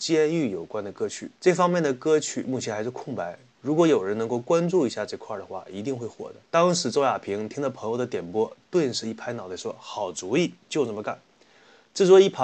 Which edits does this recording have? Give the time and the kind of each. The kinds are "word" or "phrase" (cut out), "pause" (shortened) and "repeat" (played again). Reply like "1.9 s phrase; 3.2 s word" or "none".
1.4 s pause; 6.4 s pause; 10.6 s pause